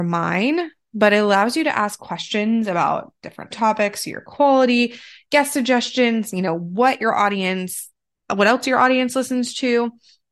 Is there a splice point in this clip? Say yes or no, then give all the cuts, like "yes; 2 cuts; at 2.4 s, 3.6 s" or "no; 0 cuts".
yes; 2 cuts; at 3.5 s, 8.2 s